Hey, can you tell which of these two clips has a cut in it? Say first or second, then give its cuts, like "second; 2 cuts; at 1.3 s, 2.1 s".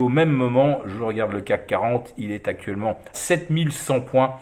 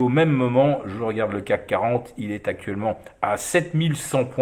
first; 1 cut; at 3.1 s